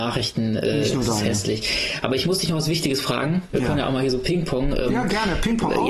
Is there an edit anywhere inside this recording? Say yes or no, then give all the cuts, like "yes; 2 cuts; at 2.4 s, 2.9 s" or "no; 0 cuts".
no; 0 cuts